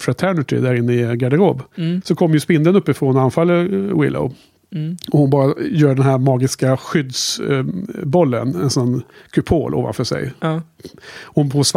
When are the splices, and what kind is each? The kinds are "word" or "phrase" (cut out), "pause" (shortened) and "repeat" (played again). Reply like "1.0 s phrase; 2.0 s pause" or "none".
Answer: none